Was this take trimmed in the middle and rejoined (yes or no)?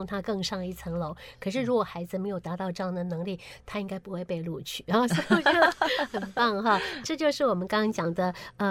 yes